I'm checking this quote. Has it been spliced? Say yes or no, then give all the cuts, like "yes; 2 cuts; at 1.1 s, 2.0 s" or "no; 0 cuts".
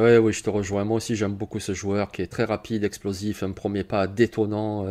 yes; 1 cut; at 2.3 s